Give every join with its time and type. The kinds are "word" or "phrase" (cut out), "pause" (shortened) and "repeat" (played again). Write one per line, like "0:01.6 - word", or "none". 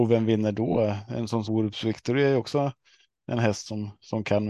0:01.4 - word